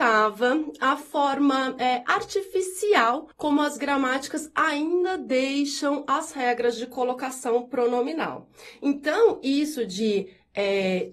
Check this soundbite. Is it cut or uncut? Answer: cut